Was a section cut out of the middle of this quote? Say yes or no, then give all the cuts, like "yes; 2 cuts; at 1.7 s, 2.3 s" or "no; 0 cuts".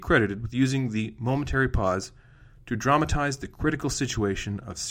no; 0 cuts